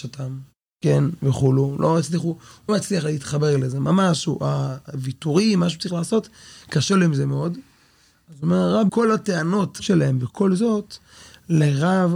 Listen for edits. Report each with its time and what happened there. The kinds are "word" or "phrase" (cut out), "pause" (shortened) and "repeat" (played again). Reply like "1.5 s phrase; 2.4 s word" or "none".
2.7 s word; 8.9 s word; 9.8 s word